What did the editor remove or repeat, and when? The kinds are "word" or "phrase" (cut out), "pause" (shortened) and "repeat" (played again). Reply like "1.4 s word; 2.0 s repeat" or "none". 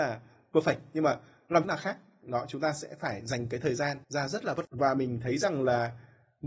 1.6 s phrase; 4.0 s pause; 4.6 s word